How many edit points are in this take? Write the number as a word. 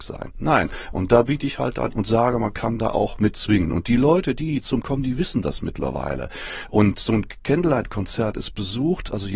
two